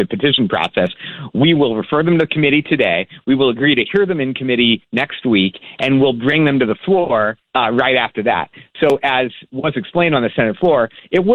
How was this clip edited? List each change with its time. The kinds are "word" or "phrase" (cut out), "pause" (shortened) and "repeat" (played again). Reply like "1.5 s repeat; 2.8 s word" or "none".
7.5 s pause